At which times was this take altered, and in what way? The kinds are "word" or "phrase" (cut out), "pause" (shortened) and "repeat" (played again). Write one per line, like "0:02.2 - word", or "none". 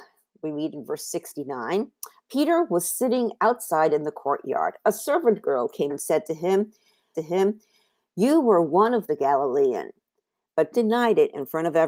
0:05.9 - word
0:07.1 - repeat
0:09.1 - phrase
0:10.7 - word